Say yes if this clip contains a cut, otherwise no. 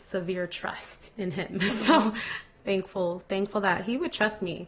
no